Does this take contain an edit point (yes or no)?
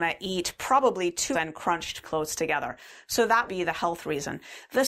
yes